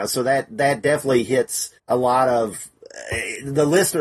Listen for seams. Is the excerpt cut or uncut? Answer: cut